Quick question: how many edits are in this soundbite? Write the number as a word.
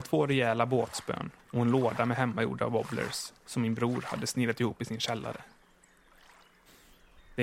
one